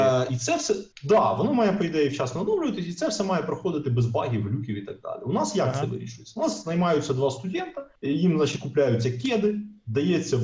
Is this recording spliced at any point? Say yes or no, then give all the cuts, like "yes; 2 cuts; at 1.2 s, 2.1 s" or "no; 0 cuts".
yes; 2 cuts; at 0.9 s, 8.0 s